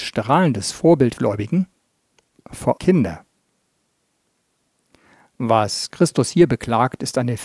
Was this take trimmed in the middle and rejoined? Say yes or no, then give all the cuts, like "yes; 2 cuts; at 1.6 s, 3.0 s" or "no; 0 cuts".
yes; 2 cuts; at 1.2 s, 2.8 s